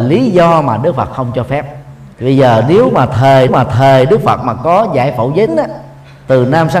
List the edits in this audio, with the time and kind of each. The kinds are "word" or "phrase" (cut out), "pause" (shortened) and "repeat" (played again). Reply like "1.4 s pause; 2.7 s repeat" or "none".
2.1 s pause; 3.5 s repeat; 5.5 s word